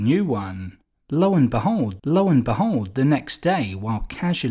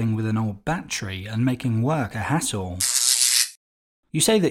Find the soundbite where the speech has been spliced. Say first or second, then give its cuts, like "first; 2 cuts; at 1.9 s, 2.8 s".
first; 1 cut; at 2.0 s